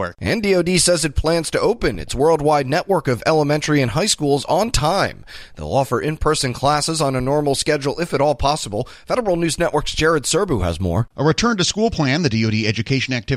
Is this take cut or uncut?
uncut